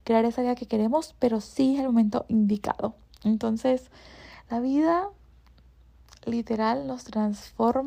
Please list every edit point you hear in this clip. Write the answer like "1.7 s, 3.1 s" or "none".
none